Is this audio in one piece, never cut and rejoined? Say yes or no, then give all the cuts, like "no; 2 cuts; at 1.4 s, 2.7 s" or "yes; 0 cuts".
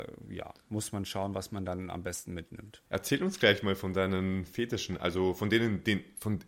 no; 1 cut; at 2.9 s